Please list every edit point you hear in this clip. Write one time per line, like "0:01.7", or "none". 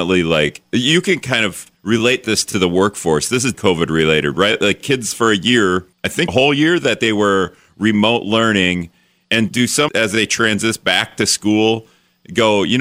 0:01.7
0:03.5
0:05.9
0:06.3
0:09.5
0:09.9